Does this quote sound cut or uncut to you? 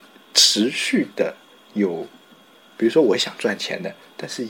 uncut